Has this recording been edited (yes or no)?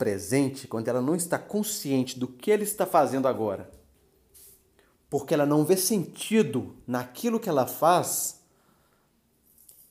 no